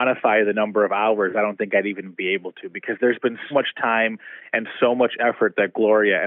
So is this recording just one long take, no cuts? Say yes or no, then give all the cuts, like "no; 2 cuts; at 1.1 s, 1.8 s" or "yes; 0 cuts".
no; 1 cut; at 3.5 s